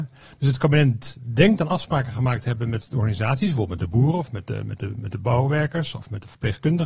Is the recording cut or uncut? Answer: uncut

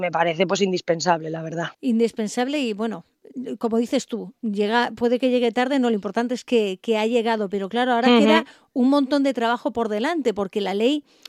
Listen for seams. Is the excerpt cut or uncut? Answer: cut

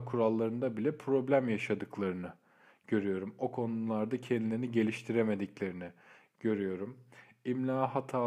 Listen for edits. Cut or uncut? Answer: uncut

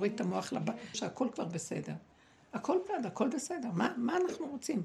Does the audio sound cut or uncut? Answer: cut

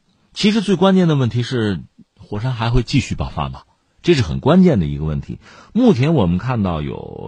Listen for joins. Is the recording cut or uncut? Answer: uncut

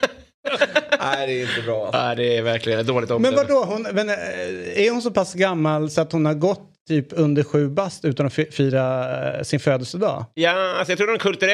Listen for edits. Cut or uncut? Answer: uncut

